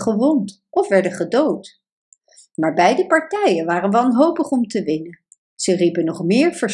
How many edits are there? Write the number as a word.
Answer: zero